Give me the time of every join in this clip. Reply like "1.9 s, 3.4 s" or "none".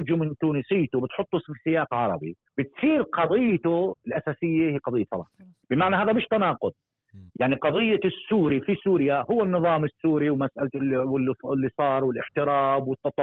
2.5 s, 5.6 s, 7.3 s